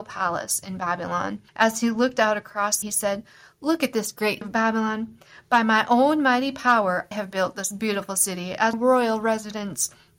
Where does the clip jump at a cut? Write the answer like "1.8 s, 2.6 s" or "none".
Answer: 1.5 s, 2.8 s, 4.4 s, 7.1 s, 8.7 s